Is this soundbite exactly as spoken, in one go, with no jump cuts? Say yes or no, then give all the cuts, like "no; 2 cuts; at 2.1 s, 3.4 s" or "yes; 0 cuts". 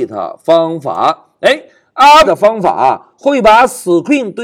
no; 1 cut; at 2.2 s